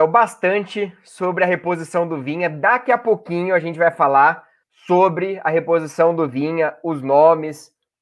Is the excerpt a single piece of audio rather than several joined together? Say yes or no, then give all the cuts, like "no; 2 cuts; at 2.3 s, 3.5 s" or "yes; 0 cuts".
no; 1 cut; at 4.6 s